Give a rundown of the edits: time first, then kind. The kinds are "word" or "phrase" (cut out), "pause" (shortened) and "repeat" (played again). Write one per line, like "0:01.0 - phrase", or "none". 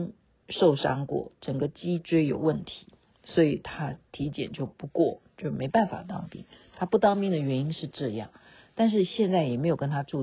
none

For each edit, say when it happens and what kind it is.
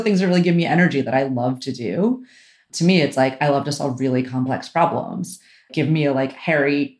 none

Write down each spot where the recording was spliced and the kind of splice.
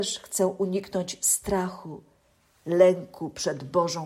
none

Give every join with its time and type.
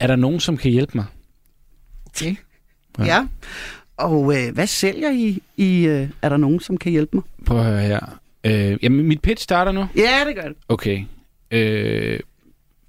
none

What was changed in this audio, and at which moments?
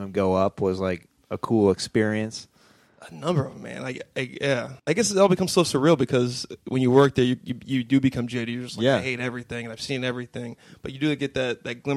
0:04.8 - pause

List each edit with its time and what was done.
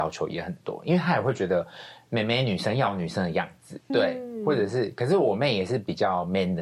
0:03.9 - word

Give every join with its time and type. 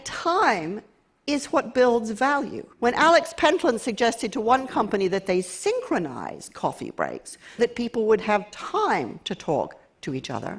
0:02.7 - pause
0:07.6 - word

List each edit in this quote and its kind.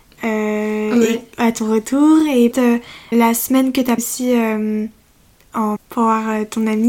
0:02.5 - word
0:03.1 - word
0:04.0 - word
0:05.8 - word

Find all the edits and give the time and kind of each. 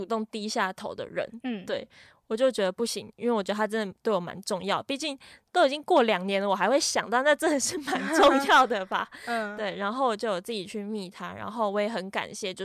none

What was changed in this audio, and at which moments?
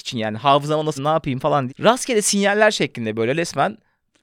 0:01.0 - word
0:01.7 - word

